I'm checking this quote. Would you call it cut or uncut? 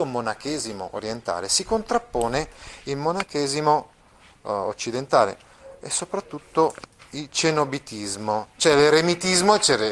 uncut